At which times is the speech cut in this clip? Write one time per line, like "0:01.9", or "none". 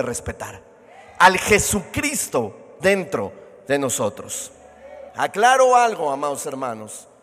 0:02.8
0:05.1